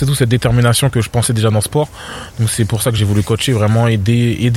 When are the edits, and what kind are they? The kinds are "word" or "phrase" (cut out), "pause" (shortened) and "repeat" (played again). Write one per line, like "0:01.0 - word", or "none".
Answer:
none

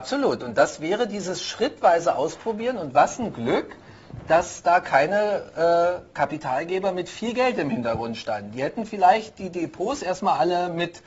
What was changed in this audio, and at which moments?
none

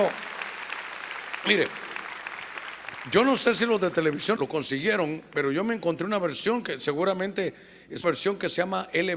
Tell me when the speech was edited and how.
0:04.4 - word
0:08.0 - word

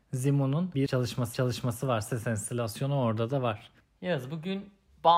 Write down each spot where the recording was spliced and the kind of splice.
0:01.3 - repeat
0:03.8 - pause

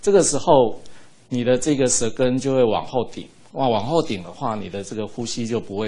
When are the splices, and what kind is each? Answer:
none

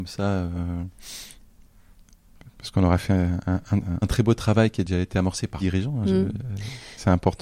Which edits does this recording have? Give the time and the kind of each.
0:04.0 - phrase
0:05.6 - phrase

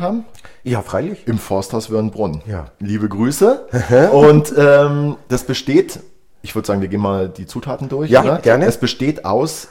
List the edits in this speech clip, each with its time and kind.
none

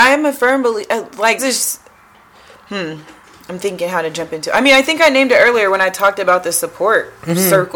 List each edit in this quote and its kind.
0:01.4 - word

